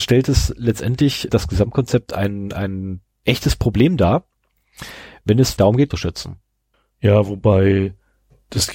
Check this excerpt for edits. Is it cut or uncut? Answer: cut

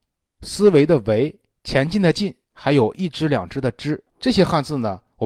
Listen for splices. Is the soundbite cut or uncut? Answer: cut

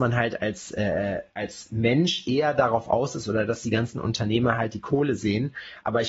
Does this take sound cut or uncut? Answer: uncut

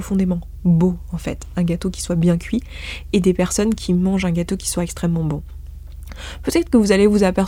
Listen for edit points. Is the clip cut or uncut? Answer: uncut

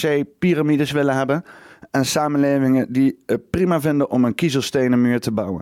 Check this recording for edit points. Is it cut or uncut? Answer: uncut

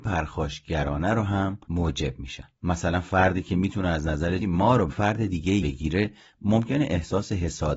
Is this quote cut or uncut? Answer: cut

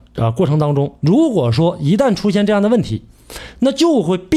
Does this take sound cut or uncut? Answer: uncut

